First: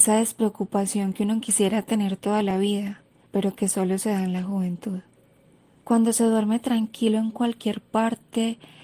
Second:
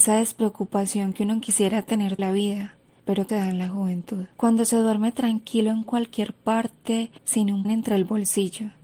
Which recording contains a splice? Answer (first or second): second